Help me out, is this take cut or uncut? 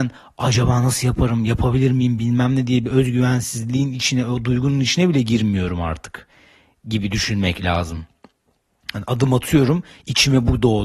uncut